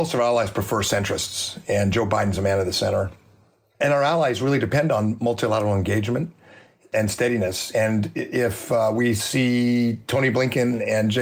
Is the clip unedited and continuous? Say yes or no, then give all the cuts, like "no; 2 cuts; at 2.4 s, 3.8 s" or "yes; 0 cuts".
yes; 0 cuts